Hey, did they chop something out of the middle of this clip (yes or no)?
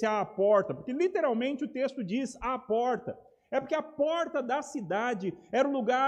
no